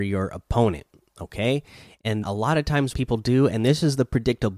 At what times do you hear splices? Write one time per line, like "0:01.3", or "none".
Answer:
0:02.2
0:02.9